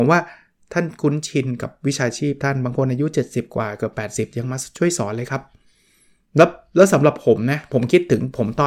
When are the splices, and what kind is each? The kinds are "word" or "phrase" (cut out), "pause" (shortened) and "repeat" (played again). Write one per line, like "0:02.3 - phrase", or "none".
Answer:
none